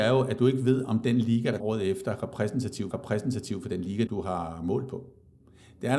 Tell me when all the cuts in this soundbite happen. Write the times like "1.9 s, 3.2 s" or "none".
1.6 s, 2.9 s, 4.1 s